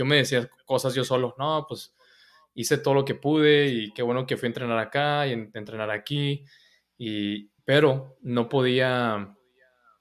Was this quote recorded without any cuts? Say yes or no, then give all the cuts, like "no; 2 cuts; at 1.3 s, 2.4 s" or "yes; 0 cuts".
no; 1 cut; at 7.6 s